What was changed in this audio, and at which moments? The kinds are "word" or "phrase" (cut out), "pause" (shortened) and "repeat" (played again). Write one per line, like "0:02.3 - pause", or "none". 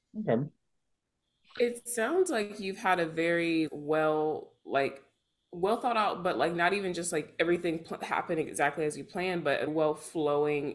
0:03.7 - word
0:09.7 - word